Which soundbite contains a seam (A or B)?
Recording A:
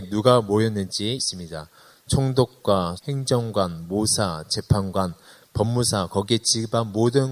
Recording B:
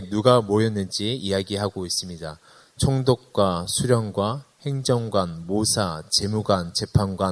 A